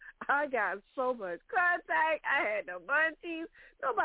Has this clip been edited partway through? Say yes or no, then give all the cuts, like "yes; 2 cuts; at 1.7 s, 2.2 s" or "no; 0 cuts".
no; 0 cuts